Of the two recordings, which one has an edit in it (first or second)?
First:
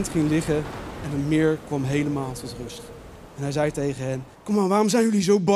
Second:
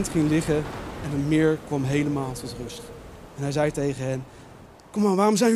first